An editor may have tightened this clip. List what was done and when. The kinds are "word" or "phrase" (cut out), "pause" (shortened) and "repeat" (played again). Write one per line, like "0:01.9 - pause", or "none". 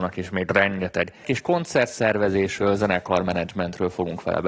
0:01.2 - word